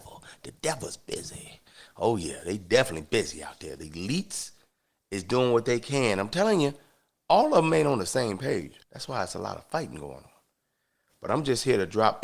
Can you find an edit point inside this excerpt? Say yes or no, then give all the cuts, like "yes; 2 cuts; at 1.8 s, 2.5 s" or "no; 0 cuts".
yes; 1 cut; at 8.8 s